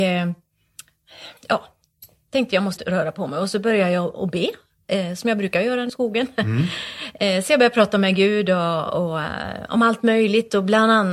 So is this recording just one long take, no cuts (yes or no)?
no